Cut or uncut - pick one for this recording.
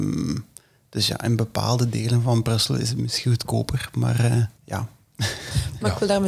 cut